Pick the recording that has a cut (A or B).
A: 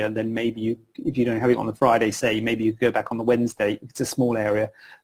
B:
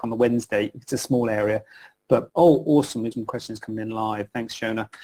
B